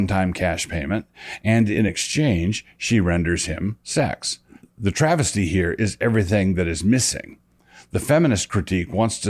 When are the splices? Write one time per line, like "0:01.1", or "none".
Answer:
none